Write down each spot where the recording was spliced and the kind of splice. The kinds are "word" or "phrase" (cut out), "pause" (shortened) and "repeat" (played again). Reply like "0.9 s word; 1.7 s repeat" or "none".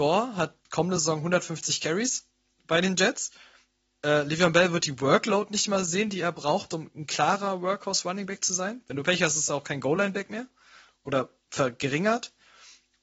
none